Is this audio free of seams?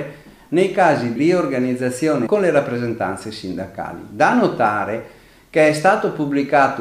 no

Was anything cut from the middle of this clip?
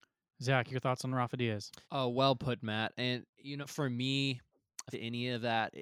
yes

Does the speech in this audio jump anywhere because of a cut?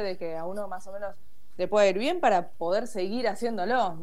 no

